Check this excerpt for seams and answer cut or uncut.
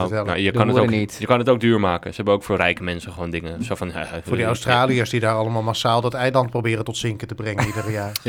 uncut